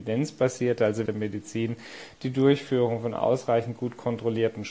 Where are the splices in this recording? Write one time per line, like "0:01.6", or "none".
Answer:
0:01.1